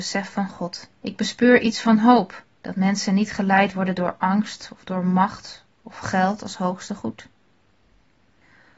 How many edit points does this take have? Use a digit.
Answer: 2